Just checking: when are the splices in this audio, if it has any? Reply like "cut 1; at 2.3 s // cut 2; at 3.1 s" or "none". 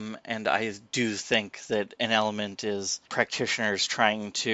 cut 1; at 3.1 s